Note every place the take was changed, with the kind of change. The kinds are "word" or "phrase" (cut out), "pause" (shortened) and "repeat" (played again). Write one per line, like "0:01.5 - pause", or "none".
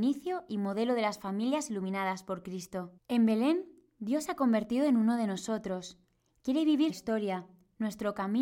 0:03.0 - pause
0:06.9 - word